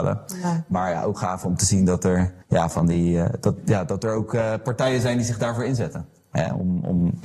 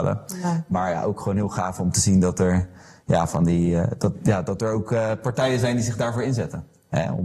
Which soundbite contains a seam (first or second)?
first